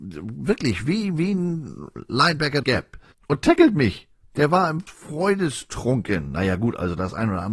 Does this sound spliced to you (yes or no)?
yes